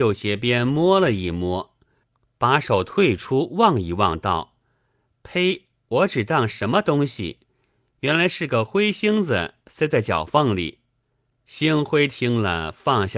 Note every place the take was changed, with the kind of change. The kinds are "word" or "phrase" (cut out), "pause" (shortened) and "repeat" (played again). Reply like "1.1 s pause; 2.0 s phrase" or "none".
none

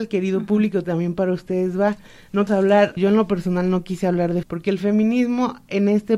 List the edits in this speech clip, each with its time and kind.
2.5 s word; 3.0 s word; 4.4 s word

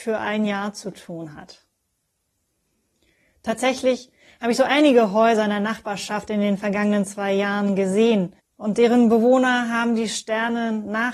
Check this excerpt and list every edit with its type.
8.4 s pause

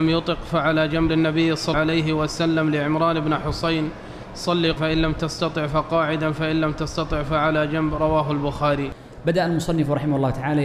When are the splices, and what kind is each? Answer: 1.1 s word; 1.7 s word; 4.8 s word

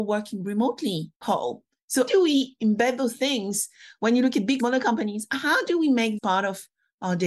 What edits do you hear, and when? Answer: 1.1 s pause; 2.1 s word; 4.6 s word; 6.2 s word

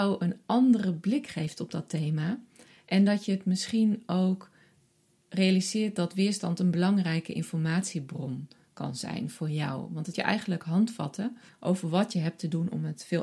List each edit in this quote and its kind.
10.1 s word; 11.5 s pause

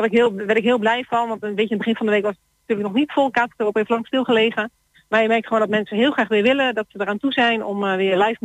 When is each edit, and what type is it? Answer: none

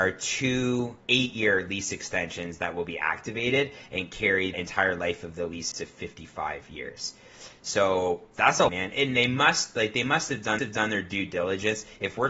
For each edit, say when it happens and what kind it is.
1.0 s pause; 4.5 s word; 5.7 s word; 8.3 s word; 8.7 s phrase; 10.6 s repeat

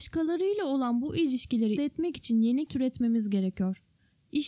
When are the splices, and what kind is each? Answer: 1.8 s word; 2.7 s word

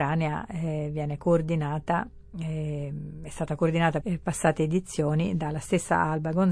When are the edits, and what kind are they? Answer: 4.0 s phrase

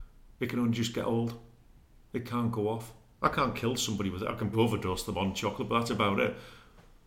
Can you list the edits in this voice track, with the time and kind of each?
4.5 s word

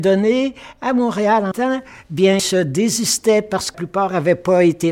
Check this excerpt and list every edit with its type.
1.5 s word; 2.4 s word; 3.7 s word

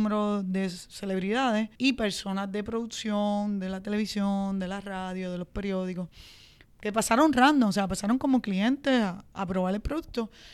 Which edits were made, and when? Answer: 1.7 s pause

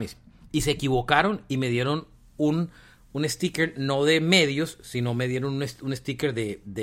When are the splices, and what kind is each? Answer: none

